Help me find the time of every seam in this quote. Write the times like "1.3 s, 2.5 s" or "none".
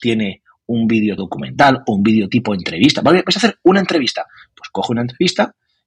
1.2 s